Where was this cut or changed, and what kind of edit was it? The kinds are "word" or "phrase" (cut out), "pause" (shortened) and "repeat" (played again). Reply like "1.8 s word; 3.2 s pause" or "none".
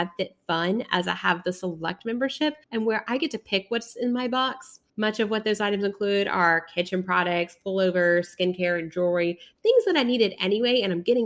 2.6 s pause; 4.9 s pause